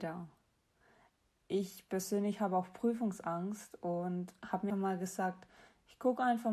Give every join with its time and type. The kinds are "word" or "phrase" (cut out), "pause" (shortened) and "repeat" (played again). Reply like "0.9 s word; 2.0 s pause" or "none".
4.7 s word